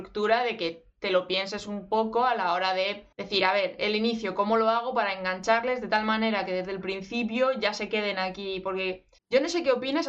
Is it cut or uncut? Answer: cut